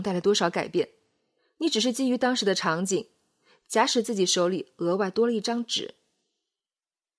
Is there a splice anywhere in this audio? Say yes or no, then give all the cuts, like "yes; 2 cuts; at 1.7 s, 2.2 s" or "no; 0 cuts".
no; 0 cuts